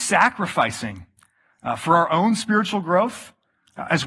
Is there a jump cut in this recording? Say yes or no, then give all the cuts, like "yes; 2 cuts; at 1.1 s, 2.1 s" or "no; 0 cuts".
no; 0 cuts